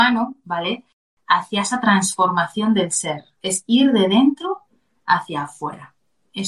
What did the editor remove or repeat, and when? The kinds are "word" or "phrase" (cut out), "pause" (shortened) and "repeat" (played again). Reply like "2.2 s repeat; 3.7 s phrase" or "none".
none